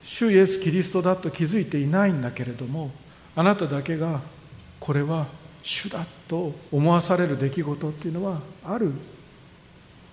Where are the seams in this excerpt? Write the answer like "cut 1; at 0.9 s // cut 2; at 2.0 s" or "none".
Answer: cut 1; at 3.1 s // cut 2; at 6.7 s // cut 3; at 8.6 s